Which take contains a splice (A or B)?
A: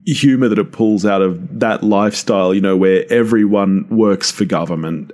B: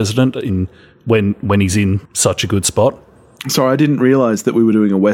B